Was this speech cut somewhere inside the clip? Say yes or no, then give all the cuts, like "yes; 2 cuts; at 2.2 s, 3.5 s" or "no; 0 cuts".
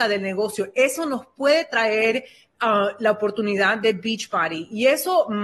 no; 0 cuts